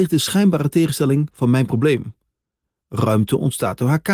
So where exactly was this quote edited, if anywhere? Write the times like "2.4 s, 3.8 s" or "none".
none